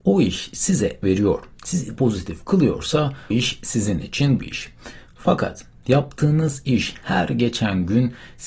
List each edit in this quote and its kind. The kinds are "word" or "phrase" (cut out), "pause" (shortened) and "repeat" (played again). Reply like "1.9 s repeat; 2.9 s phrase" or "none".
1.0 s word; 2.0 s word; 3.3 s word; 4.4 s word